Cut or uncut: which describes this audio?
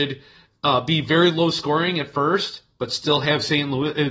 uncut